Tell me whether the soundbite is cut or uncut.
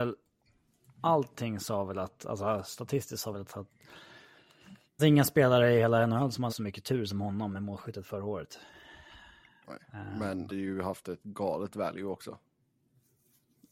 cut